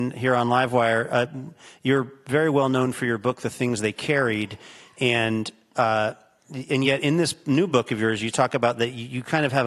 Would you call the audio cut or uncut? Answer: uncut